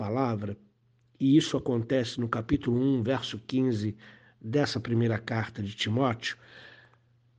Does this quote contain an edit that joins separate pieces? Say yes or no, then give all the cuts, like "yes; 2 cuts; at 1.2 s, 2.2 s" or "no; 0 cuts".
no; 0 cuts